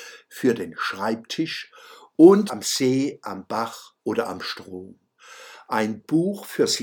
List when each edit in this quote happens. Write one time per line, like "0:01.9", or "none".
0:02.5
0:04.0